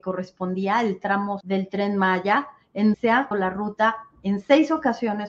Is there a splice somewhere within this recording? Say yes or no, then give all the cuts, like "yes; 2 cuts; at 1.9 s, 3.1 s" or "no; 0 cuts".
yes; 3 cuts; at 1.4 s, 2.9 s, 3.3 s